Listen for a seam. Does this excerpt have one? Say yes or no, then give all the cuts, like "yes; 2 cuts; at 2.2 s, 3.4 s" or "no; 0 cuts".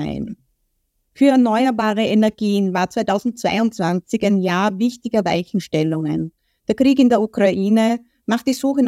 no; 0 cuts